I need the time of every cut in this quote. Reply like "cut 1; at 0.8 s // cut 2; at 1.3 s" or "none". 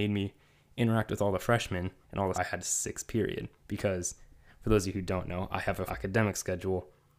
cut 1; at 2.0 s // cut 2; at 2.3 s // cut 3; at 3.6 s // cut 4; at 5.9 s

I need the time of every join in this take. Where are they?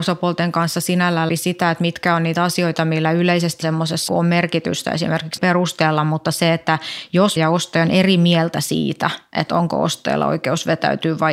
cut 1; at 1.3 s // cut 2; at 3.6 s // cut 3; at 4.1 s // cut 4; at 5.4 s // cut 5; at 7.4 s

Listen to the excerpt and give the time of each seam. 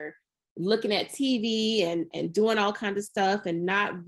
none

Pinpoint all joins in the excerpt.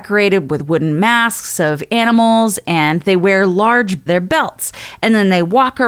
cut 1; at 4.1 s

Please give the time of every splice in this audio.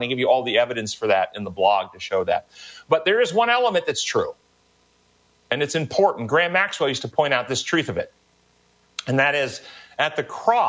none

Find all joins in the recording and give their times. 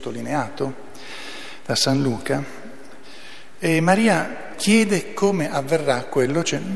cut 1; at 4.5 s

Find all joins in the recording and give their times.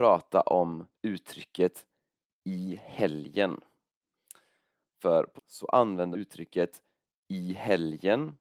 cut 1; at 0.9 s // cut 2; at 5.4 s // cut 3; at 6.1 s

